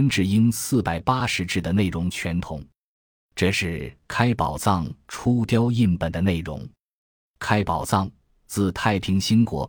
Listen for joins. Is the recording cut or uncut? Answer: uncut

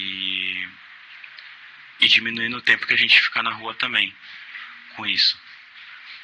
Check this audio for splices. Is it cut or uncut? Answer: cut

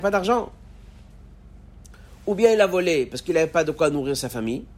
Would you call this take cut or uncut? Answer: uncut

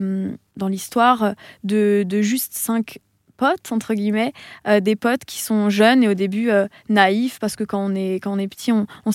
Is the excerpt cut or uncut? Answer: uncut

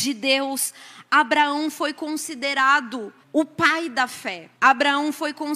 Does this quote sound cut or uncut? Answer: cut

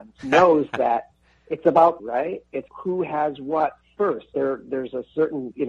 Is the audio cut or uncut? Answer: cut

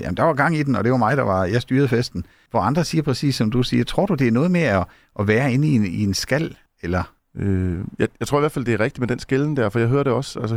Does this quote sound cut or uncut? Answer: uncut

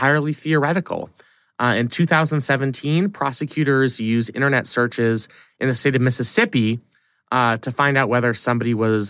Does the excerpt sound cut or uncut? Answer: uncut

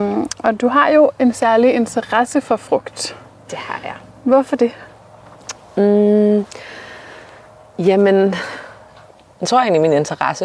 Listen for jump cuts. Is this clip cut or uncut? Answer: uncut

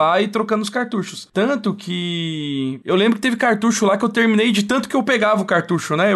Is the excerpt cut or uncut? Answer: uncut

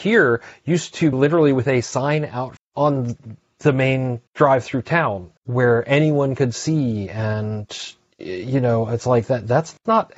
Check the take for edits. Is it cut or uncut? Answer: cut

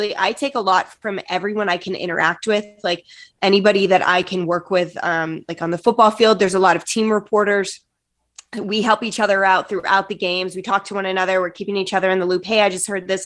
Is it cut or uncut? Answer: uncut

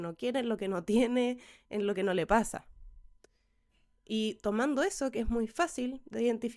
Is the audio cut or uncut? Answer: uncut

